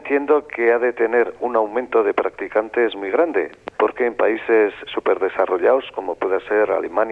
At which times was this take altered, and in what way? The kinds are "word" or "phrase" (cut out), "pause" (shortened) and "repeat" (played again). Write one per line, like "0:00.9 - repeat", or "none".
0:03.7 - pause
0:04.9 - word